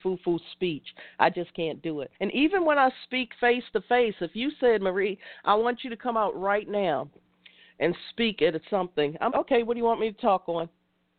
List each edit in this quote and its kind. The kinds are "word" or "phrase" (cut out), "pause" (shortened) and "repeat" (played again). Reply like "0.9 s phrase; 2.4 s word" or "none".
2.1 s pause; 9.3 s word